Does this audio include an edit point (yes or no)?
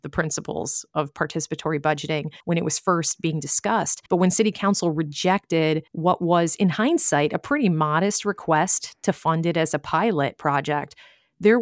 yes